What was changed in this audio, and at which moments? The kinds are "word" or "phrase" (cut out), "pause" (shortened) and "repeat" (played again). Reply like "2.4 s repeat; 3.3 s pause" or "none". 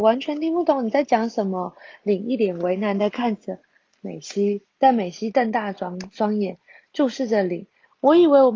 4.7 s pause